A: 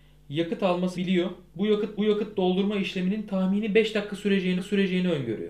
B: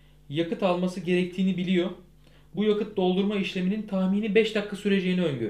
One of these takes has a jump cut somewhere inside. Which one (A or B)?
A